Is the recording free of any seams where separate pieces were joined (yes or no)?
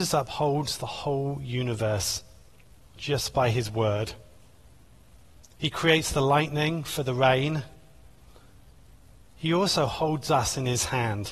yes